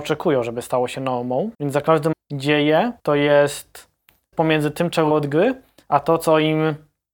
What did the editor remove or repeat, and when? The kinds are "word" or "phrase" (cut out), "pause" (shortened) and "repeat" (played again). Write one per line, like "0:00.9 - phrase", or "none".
0:01.5 - pause
0:02.1 - phrase
0:03.0 - pause
0:04.3 - word
0:05.1 - phrase